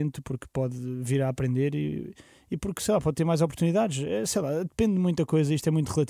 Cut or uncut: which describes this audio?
uncut